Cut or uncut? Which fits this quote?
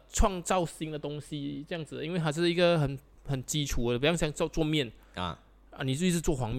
uncut